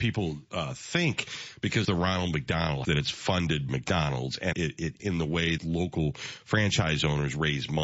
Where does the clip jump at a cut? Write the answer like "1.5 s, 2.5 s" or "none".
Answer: 1.8 s, 2.8 s, 3.7 s, 4.5 s, 5.0 s, 5.6 s